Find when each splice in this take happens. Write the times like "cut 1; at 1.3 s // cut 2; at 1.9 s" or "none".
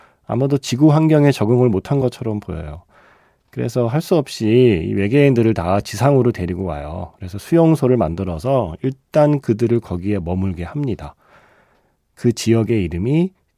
none